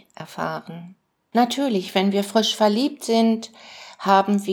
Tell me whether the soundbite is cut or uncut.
uncut